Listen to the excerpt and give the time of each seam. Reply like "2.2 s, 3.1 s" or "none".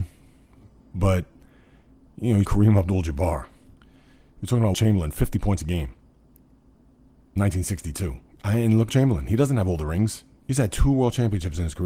2.4 s, 4.7 s, 8.9 s